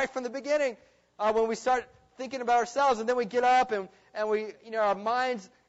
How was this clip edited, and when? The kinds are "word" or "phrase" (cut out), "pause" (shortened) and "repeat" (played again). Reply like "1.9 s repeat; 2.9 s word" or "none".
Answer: none